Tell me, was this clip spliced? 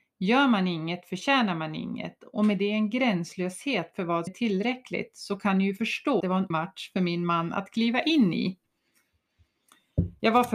yes; 3 cuts; at 4.3 s, 6.2 s, 6.5 s

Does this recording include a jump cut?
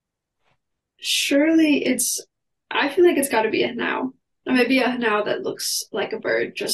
no; 0 cuts

